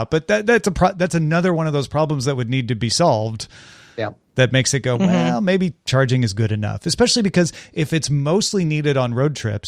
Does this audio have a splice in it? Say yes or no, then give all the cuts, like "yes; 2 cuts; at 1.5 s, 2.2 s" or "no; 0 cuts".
no; 0 cuts